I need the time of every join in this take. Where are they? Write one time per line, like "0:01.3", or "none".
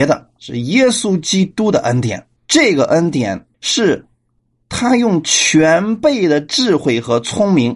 0:02.4
0:03.5